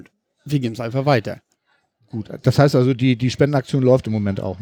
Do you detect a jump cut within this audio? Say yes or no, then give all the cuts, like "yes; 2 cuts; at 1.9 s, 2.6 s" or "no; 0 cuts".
no; 0 cuts